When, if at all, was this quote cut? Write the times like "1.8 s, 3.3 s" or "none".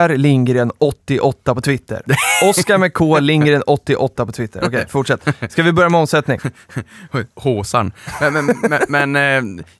none